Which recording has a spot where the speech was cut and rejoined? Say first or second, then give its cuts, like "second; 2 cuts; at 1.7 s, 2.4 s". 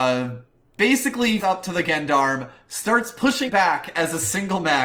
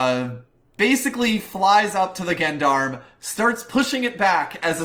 first; 2 cuts; at 1.4 s, 3.5 s